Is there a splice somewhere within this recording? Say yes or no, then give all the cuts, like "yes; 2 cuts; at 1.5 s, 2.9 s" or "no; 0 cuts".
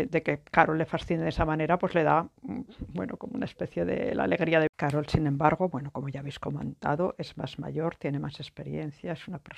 yes; 2 cuts; at 2.4 s, 4.7 s